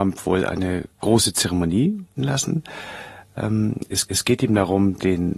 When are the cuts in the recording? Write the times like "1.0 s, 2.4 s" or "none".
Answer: 0.9 s, 2.2 s, 4.1 s